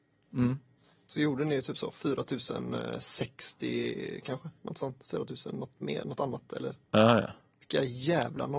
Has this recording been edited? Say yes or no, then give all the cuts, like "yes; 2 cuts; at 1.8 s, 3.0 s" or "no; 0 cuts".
no; 0 cuts